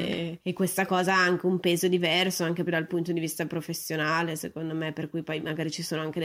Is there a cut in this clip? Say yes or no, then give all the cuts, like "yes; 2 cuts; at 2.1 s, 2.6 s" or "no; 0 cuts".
yes; 1 cut; at 2.7 s